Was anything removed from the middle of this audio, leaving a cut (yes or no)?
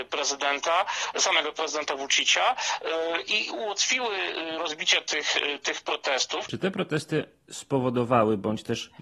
no